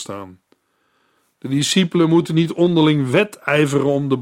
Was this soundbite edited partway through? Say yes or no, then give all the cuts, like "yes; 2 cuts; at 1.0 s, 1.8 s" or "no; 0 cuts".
no; 0 cuts